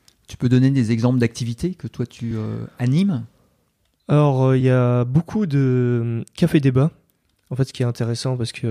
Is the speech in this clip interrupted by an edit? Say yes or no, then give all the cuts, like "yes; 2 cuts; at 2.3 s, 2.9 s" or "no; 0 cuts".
no; 0 cuts